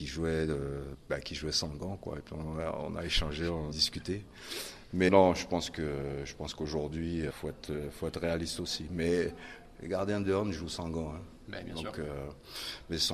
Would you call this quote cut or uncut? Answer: cut